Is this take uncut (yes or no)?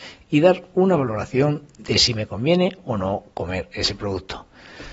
yes